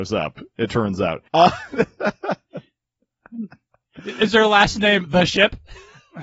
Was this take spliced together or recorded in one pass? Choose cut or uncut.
uncut